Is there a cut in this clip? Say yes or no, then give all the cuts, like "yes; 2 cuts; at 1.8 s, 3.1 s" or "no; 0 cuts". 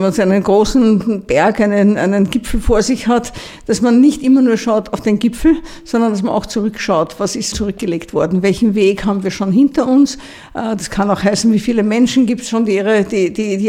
yes; 1 cut; at 7.5 s